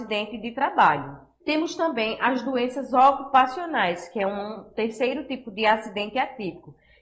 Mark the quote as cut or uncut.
cut